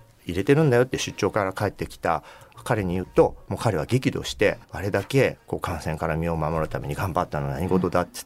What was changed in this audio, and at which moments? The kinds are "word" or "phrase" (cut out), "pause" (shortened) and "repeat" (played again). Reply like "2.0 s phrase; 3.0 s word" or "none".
4.6 s pause